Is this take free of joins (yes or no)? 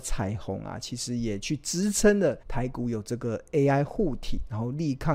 no